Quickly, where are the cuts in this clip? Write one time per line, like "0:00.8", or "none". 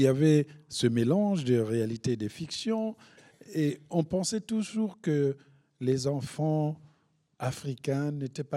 none